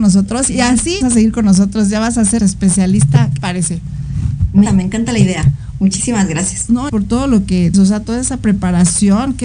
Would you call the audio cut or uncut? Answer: cut